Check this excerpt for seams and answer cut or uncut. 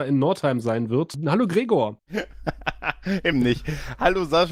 cut